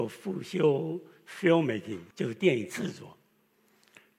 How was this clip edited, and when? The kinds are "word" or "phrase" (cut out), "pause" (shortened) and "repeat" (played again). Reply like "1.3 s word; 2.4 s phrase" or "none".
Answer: 2.1 s pause